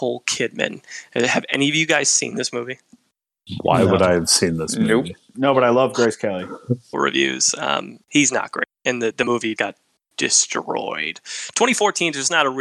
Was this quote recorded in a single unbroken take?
no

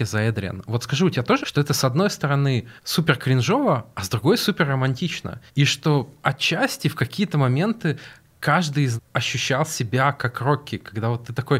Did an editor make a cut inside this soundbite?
yes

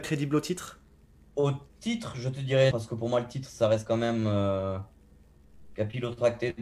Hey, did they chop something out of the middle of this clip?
yes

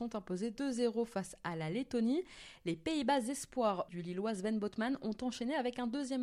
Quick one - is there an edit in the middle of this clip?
yes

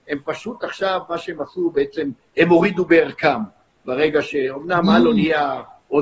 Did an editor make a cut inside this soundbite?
no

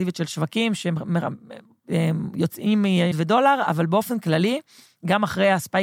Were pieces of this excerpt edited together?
yes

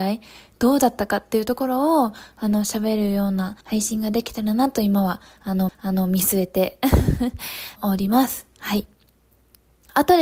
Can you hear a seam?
yes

